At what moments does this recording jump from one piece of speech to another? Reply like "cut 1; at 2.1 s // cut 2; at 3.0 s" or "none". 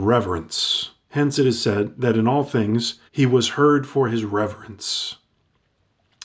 cut 1; at 3.1 s